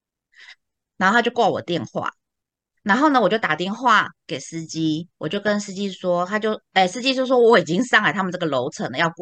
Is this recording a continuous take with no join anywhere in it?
yes; 0 cuts

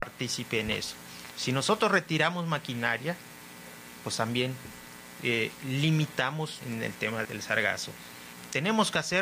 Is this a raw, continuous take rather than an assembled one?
no; 2 cuts; at 6.6 s, 7.2 s

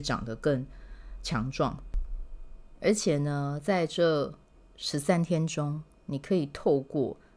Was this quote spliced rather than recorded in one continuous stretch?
no; 0 cuts

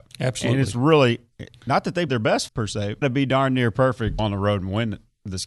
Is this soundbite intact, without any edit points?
no; 4 cuts; at 2.1 s, 2.5 s, 3.0 s, 4.2 s

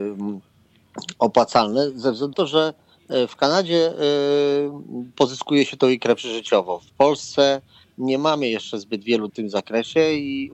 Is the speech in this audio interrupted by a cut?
yes; 2 cuts; at 2.3 s, 9.3 s

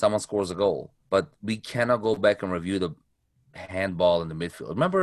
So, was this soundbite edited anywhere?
yes; 1 cut; at 1.0 s

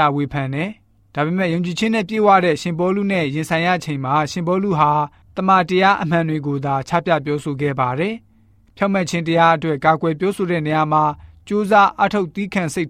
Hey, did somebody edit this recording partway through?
no; 0 cuts

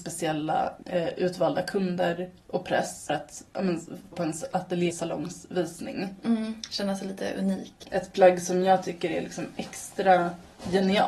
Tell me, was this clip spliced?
yes; 3 cuts; at 3.1 s, 4.1 s, 4.9 s

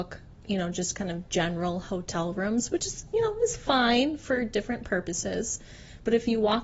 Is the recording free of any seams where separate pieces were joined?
yes; 0 cuts

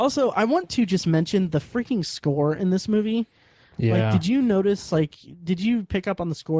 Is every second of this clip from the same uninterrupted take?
yes; 0 cuts

